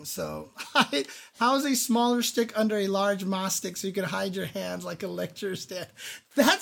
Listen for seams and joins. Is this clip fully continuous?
yes; 0 cuts

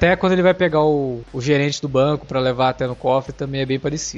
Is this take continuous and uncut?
yes; 0 cuts

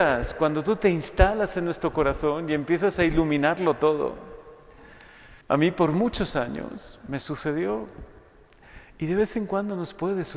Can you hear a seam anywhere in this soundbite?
yes; 1 cut; at 5.4 s

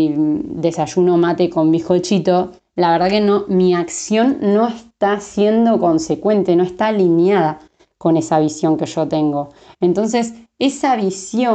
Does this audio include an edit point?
no; 0 cuts

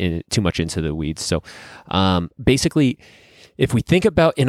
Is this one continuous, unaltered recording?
yes; 0 cuts

